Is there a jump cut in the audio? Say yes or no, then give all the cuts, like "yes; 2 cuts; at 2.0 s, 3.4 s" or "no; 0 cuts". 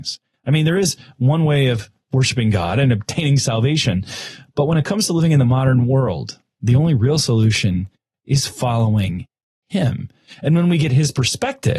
no; 0 cuts